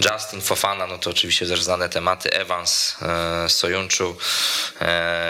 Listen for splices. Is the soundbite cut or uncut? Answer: uncut